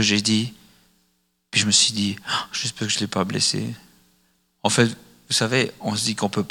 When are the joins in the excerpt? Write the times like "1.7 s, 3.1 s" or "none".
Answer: none